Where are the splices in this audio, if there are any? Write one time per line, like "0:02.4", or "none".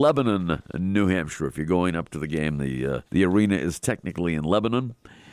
0:03.0

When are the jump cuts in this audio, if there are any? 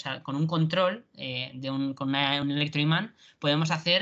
none

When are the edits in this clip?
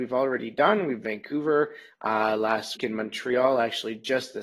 0:01.0
0:02.8

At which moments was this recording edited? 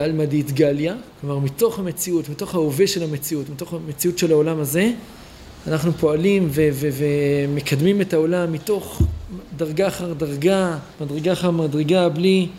0:01.1
0:10.9

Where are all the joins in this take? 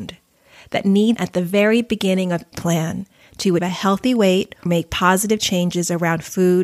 0:01.2
0:02.5
0:03.6
0:04.7

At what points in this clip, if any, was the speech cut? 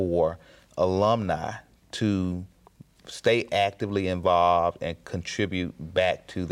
none

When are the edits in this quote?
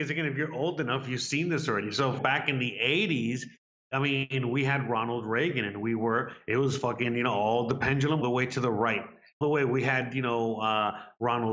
0:02.2
0:08.2
0:09.4

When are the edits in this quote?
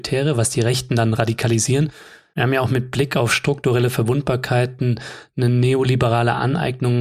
none

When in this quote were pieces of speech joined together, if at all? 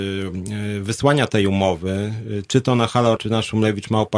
0:03.2

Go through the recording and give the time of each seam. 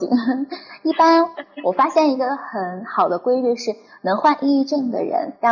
none

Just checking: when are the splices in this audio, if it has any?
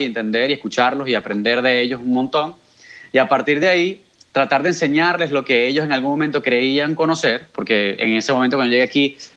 none

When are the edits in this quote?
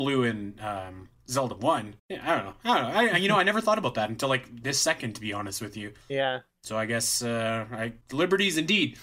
0:02.0
0:06.0
0:08.0

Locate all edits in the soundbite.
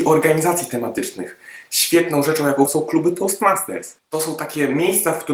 0:02.7
0:04.0

